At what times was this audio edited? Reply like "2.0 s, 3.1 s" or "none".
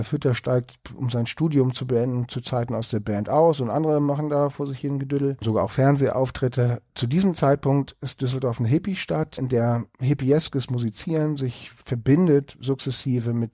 9.9 s